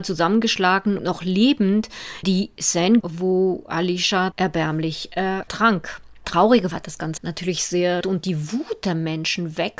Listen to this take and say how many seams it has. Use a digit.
8